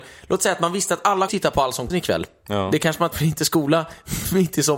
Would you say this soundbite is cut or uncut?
cut